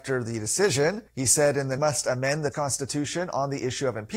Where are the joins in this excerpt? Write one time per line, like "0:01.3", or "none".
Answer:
0:01.1
0:01.8
0:02.5